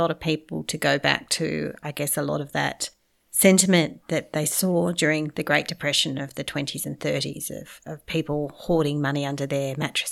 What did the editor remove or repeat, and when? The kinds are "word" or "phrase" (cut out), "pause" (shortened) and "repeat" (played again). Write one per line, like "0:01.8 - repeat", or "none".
none